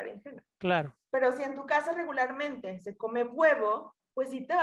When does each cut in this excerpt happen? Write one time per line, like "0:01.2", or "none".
0:01.0